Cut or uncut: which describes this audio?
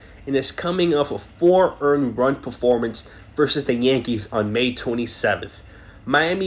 uncut